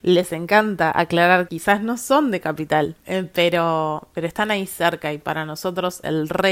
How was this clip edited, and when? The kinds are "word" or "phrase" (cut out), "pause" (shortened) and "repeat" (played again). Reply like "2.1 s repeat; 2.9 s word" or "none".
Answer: 1.5 s word; 3.0 s pause

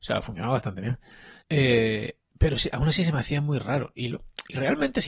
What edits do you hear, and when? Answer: 1.4 s pause

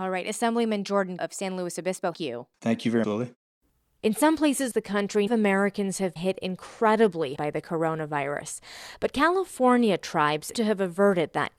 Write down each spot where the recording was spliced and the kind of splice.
1.2 s word; 2.1 s word; 3.0 s word; 4.7 s word; 5.3 s word; 6.2 s word; 7.4 s word; 10.5 s word

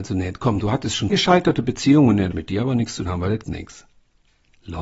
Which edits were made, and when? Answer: 1.1 s word; 2.3 s word; 3.0 s word; 3.4 s word

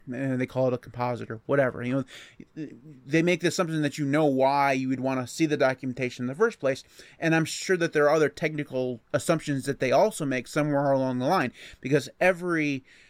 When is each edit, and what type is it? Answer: 9.0 s pause

